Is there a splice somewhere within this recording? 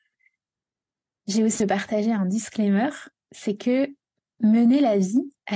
yes; 1 cut; at 1.6 s

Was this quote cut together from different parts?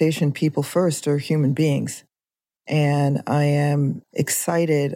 yes; 1 cut; at 4.0 s

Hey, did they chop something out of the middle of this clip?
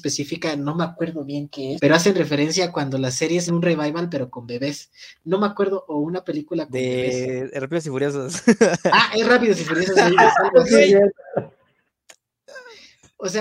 yes; 2 cuts; at 1.8 s, 3.5 s

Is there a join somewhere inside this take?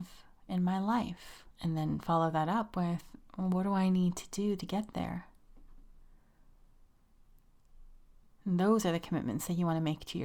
yes; 1 cut; at 1.5 s

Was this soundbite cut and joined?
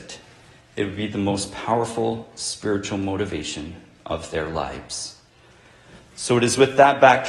no; 0 cuts

